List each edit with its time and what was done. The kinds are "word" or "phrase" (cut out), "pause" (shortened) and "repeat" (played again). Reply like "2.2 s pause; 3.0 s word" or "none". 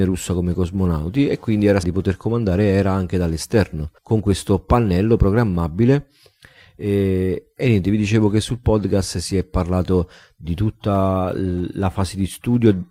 1.8 s phrase; 4.0 s pause